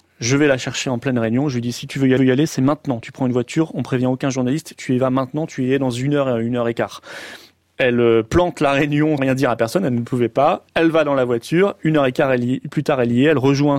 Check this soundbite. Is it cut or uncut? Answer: cut